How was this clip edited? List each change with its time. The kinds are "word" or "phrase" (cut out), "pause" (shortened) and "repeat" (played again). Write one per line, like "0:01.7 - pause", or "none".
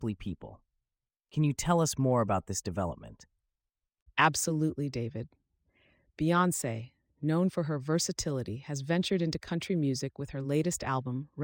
none